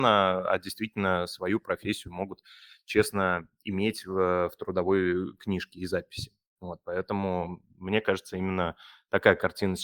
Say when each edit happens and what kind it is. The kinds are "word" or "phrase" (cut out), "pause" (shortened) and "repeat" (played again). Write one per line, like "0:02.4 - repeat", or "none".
none